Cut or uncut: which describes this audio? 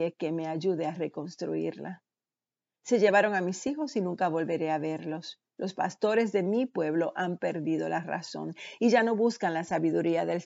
uncut